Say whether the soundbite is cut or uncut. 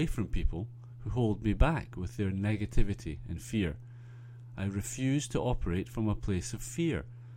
uncut